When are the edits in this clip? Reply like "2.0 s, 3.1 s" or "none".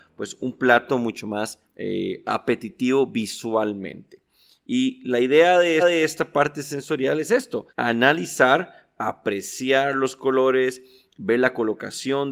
1.7 s, 5.8 s, 7.7 s